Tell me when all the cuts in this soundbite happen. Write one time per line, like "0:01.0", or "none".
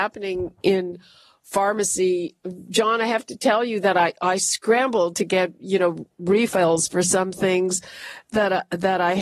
none